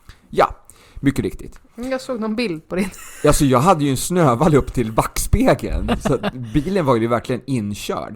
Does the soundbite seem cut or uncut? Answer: uncut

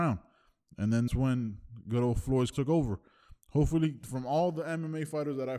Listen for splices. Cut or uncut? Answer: cut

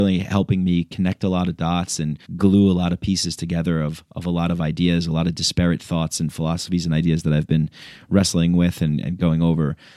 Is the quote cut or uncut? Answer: cut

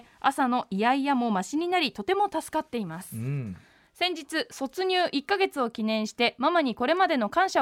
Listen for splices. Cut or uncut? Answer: uncut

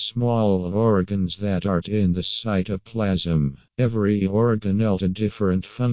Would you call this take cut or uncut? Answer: cut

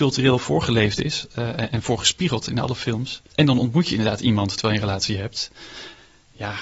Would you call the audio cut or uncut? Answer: cut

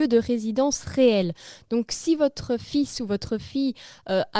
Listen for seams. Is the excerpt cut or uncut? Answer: uncut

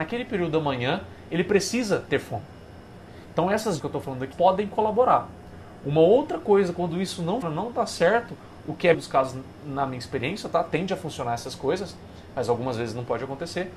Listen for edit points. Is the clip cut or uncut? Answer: cut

